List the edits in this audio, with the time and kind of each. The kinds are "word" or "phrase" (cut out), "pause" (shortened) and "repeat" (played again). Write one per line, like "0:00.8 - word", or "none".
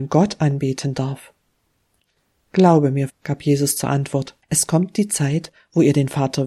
0:03.1 - word
0:04.4 - pause